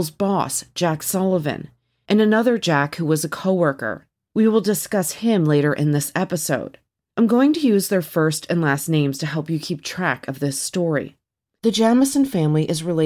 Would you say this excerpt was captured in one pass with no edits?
yes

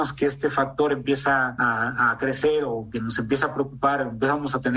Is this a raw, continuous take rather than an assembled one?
yes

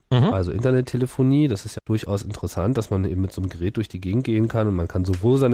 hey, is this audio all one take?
no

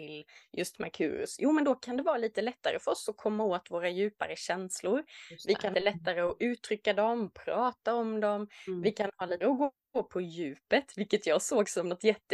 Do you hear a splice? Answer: yes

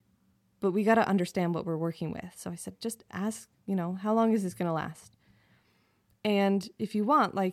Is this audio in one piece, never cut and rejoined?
yes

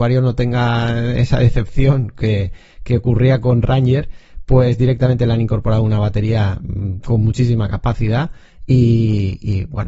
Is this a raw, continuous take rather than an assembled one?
yes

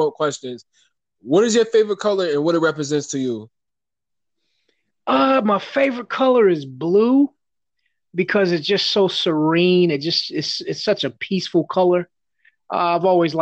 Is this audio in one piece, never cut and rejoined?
yes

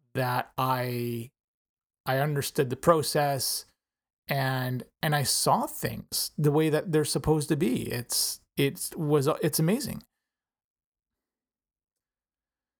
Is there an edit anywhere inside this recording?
no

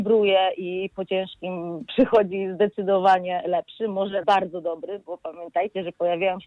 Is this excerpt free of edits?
no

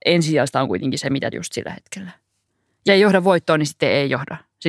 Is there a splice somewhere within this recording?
yes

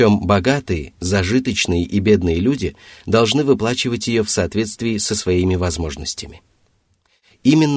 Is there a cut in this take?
no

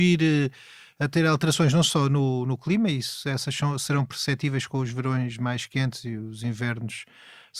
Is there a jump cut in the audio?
no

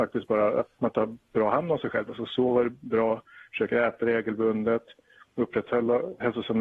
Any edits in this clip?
no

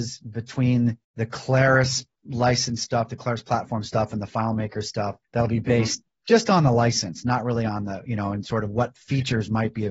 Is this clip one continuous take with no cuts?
no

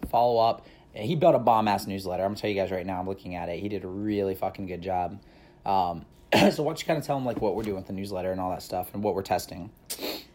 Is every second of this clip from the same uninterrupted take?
no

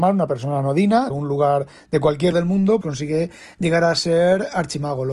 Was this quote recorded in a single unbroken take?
no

